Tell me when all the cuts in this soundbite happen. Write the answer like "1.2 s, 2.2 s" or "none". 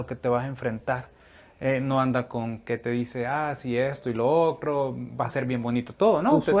none